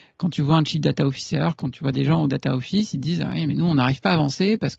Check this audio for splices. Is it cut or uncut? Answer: uncut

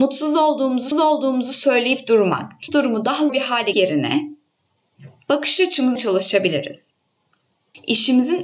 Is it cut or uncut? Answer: cut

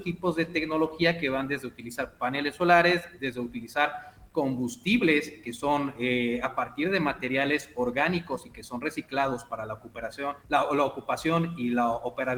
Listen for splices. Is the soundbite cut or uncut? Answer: cut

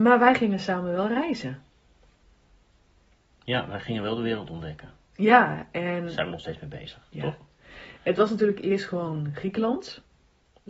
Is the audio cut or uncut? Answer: uncut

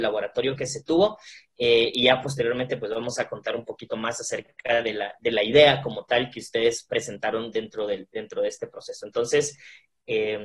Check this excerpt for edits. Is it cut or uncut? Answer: uncut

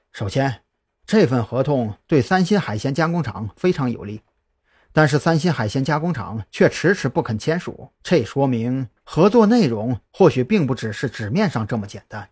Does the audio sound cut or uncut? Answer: cut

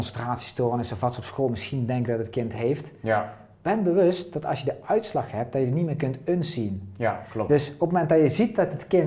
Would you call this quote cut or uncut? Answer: uncut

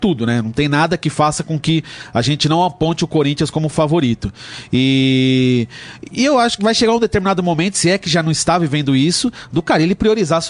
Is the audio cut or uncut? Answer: cut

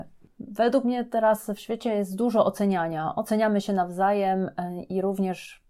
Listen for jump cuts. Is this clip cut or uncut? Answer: uncut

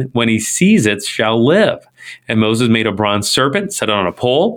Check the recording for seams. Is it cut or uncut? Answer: uncut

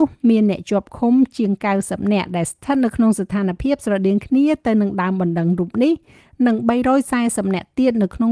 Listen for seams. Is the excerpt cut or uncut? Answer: uncut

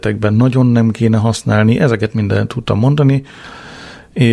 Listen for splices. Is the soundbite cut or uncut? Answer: uncut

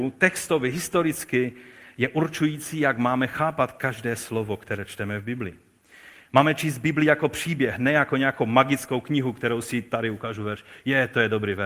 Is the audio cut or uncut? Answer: uncut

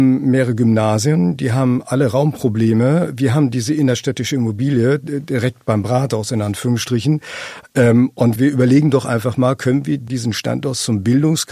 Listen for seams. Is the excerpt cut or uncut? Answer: cut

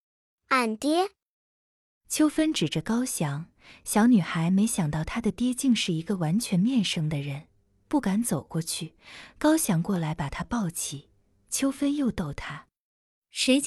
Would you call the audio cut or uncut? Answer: uncut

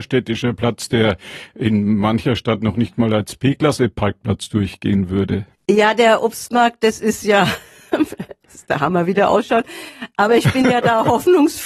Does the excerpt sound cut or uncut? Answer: cut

